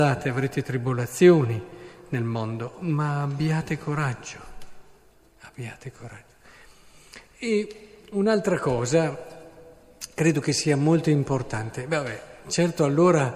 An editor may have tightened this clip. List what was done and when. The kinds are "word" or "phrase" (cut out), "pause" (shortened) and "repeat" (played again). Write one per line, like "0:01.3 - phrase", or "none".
none